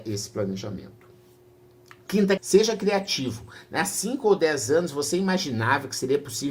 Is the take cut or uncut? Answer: cut